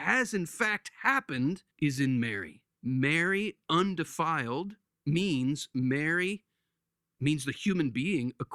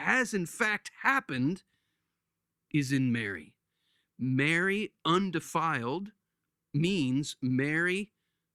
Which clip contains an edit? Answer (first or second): first